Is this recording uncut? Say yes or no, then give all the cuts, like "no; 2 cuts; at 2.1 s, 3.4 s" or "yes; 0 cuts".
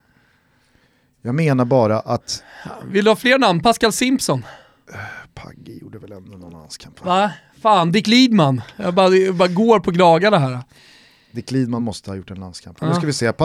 yes; 0 cuts